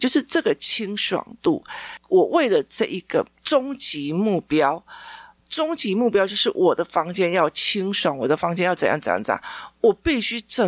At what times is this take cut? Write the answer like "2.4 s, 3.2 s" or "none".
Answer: none

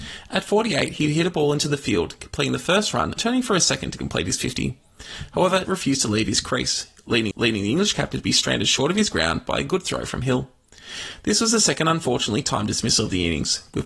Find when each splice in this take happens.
3.2 s, 5.7 s, 7.3 s

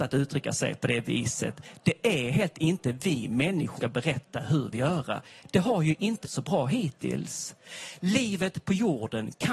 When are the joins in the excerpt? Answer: 2.5 s, 3.8 s, 4.7 s, 6.2 s

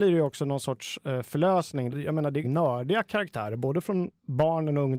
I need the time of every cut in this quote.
1.9 s, 2.4 s

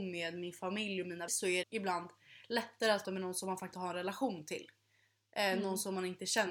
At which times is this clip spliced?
1.3 s, 1.6 s, 3.0 s, 3.7 s

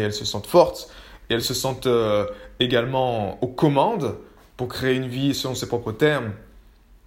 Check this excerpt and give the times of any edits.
none

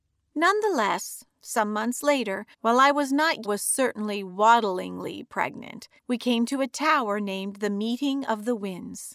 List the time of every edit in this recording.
2.5 s, 3.4 s, 6.0 s

